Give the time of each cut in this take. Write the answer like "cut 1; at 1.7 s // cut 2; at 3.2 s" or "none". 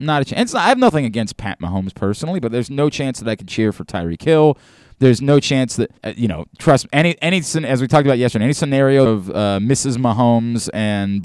cut 1; at 6.0 s // cut 2; at 9.1 s

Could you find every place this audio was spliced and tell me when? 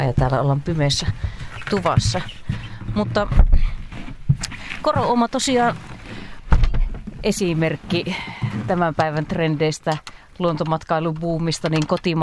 none

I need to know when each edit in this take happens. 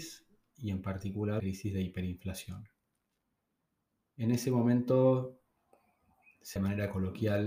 cut 1; at 1.4 s // cut 2; at 6.6 s

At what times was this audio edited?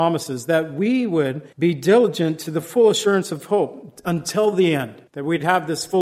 cut 1; at 1.5 s // cut 2; at 5.1 s

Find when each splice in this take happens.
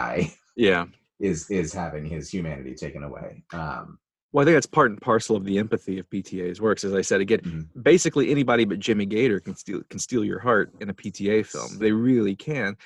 cut 1; at 11.8 s

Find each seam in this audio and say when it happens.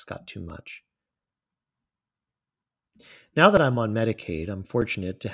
none

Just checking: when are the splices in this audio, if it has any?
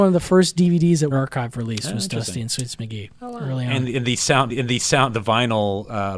cut 1; at 1.1 s // cut 2; at 4.5 s

